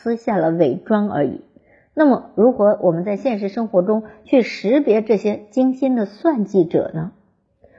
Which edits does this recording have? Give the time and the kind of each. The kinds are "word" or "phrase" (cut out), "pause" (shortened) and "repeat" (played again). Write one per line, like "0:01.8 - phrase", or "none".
none